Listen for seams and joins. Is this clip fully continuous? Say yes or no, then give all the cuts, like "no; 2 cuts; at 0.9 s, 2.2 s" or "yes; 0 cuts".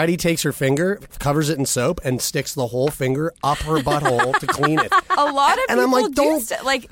yes; 0 cuts